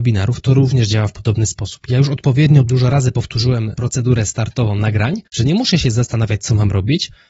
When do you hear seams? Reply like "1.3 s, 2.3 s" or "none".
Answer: 5.3 s

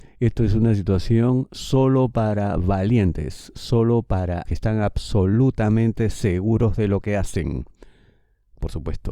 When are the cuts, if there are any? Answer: 4.4 s

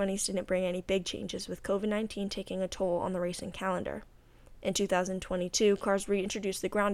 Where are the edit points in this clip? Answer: none

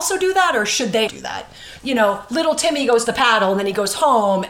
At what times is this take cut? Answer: 1.1 s, 1.8 s, 3.0 s

